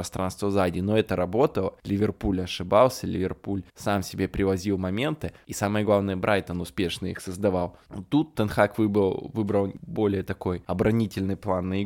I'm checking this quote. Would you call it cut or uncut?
cut